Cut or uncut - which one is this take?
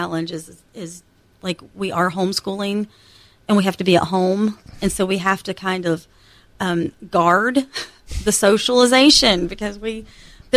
uncut